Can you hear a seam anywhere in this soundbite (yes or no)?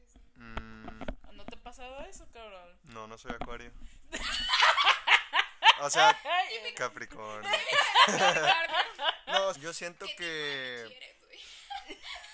yes